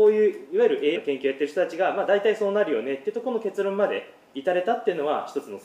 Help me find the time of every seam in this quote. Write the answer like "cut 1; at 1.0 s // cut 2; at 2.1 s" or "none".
cut 1; at 1.0 s